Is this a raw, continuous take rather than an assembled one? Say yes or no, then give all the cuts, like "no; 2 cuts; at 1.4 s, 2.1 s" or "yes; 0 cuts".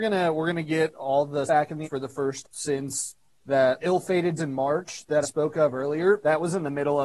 no; 6 cuts; at 1.5 s, 1.8 s, 2.4 s, 3.8 s, 4.4 s, 5.2 s